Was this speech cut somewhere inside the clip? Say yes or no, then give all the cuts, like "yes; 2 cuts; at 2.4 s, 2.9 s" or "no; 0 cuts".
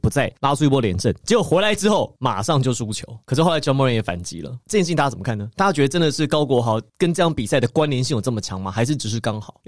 no; 0 cuts